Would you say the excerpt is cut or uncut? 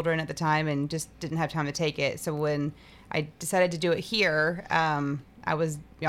uncut